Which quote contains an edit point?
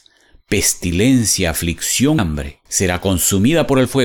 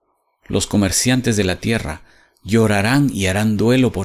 first; 2 cuts; at 2.2 s, 2.7 s

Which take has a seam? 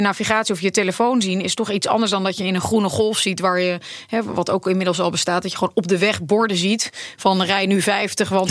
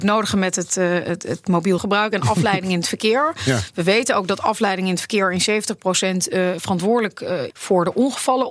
second; 2 cuts; at 1.8 s, 7.5 s

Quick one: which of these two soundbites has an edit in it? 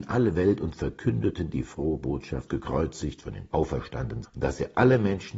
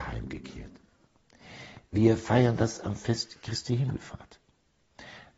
first; 3 cuts; at 2.5 s, 3.5 s, 4.2 s

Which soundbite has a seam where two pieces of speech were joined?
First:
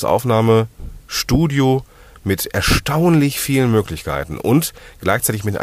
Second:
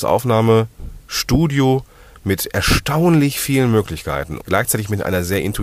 second; 1 cut; at 4.4 s

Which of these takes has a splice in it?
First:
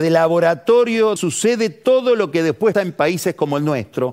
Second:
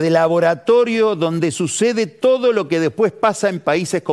first; 2 cuts; at 1.2 s, 2.7 s

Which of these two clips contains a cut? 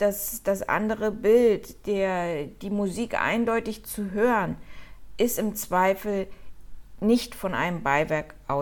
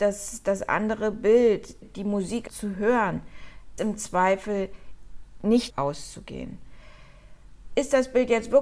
second; 4 cuts; at 1.8 s, 2.5 s, 3.8 s, 5.7 s

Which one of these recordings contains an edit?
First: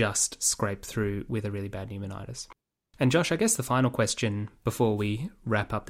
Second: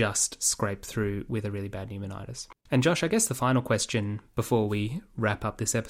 second; 1 cut; at 2.6 s

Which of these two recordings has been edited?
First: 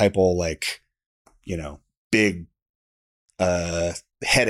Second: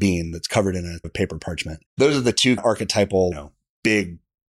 second; 4 cuts; at 1.0 s, 1.9 s, 2.6 s, 3.3 s

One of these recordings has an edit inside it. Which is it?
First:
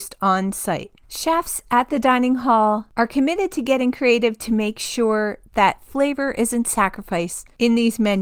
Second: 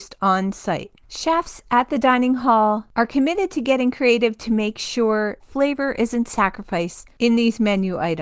second; 1 cut; at 5.4 s

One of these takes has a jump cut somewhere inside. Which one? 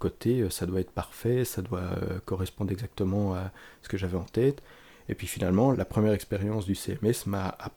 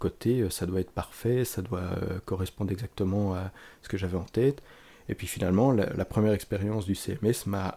first; 1 cut; at 5.7 s

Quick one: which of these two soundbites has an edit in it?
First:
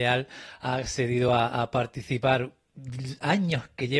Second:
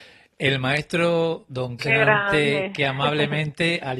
second; 1 cut; at 1.8 s

